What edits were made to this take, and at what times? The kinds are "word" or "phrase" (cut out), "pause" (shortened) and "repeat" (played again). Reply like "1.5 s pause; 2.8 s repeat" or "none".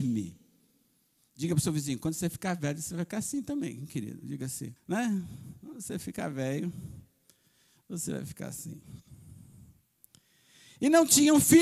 4.8 s pause